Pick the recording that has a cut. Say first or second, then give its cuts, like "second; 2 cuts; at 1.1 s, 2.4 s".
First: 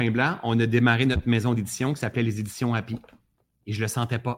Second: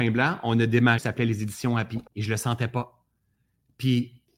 second; 2 cuts; at 1.0 s, 2.1 s